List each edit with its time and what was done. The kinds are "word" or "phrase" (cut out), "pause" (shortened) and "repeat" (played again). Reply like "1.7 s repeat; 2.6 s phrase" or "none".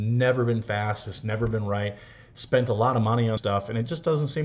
3.4 s word

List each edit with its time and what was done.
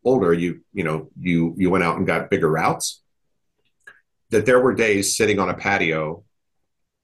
none

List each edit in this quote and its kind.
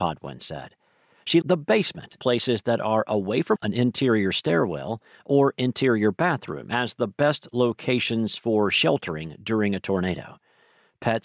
1.4 s word; 2.2 s word; 3.6 s word

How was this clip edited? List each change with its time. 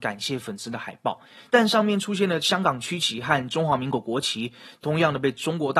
none

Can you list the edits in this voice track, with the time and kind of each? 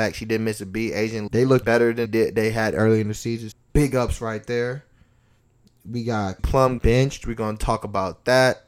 1.3 s word; 1.6 s word; 2.1 s word; 3.5 s word; 6.4 s word; 6.8 s word

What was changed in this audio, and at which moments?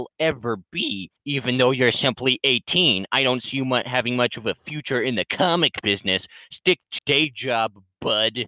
1.2 s pause; 7.0 s word

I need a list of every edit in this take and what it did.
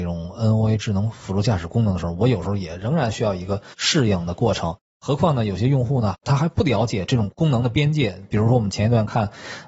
3.7 s pause

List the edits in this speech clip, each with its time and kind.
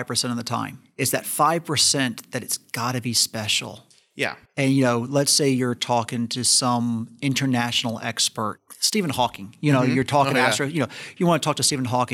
none

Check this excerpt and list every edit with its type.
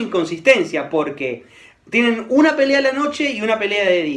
none

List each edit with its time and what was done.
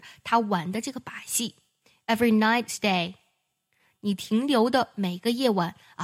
2.7 s word

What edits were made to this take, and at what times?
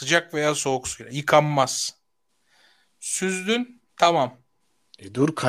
3.9 s pause

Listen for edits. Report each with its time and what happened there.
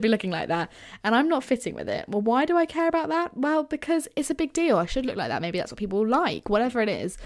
none

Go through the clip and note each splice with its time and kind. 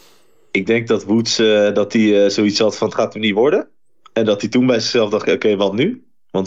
none

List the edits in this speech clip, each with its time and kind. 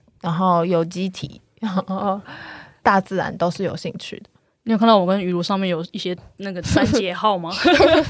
none

